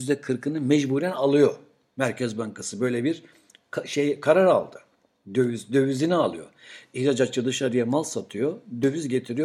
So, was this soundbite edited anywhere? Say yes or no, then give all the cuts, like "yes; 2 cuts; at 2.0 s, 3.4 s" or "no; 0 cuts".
no; 0 cuts